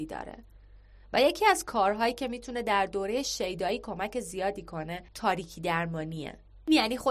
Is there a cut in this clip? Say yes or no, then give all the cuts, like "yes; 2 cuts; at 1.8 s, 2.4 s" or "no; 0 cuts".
yes; 1 cut; at 5.1 s